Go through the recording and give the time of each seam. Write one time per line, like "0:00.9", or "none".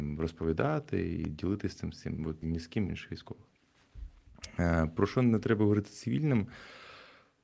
0:02.4
0:02.9